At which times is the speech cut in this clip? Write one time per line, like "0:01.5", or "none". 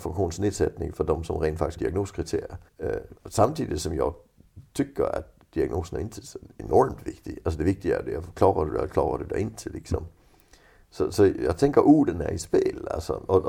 0:01.8
0:02.7
0:03.2